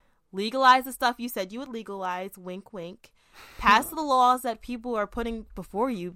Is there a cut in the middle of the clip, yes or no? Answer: no